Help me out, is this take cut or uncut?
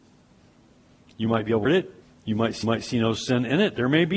cut